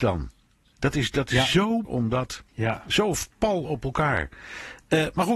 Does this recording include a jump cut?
yes; 2 cuts; at 1.8 s, 2.5 s

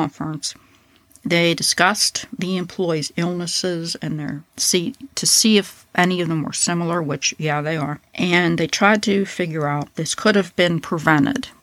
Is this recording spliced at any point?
yes; 3 cuts; at 4.5 s, 8.1 s, 9.9 s

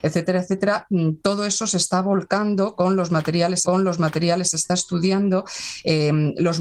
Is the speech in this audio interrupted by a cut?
yes; 1 cut; at 3.6 s

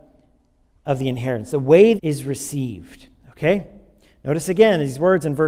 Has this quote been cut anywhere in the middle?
yes; 1 cut; at 2.0 s

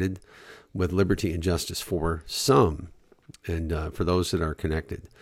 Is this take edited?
no; 0 cuts

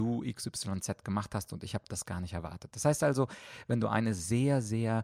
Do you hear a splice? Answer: no; 0 cuts

